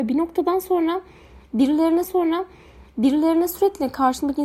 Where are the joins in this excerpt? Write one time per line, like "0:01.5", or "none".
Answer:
0:02.0